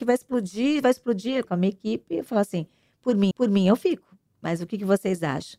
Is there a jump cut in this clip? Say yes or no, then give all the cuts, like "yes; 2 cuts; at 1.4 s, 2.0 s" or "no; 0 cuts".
yes; 3 cuts; at 1.4 s, 3.3 s, 4.3 s